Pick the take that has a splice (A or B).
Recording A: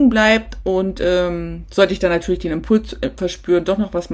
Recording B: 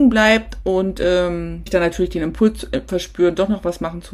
B